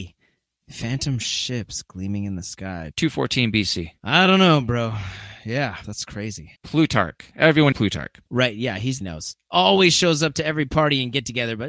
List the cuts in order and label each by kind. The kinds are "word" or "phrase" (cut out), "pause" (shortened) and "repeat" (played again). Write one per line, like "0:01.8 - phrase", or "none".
0:02.9 - word
0:05.8 - word
0:06.6 - pause
0:07.7 - word
0:08.3 - pause
0:09.0 - phrase